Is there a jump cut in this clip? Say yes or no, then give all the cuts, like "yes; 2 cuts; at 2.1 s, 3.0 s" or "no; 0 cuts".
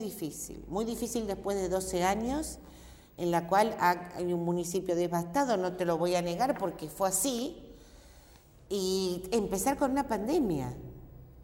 no; 0 cuts